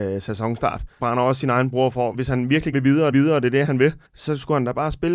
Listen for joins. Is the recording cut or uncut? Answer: cut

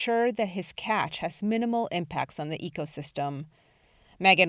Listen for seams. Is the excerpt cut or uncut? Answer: uncut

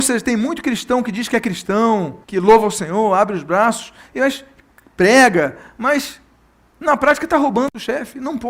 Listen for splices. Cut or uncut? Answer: cut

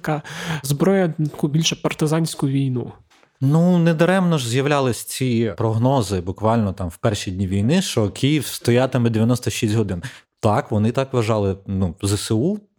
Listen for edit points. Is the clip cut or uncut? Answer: uncut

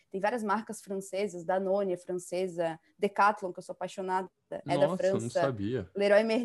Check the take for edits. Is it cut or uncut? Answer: uncut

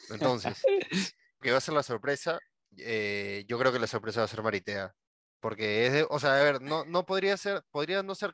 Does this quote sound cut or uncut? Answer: cut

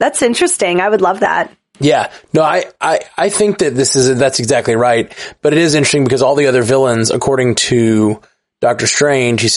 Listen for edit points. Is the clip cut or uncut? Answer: uncut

